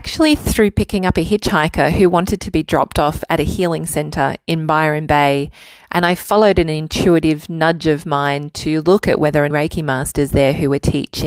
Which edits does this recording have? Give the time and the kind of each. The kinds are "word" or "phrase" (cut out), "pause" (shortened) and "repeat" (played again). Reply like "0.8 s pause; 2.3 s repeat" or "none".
9.5 s phrase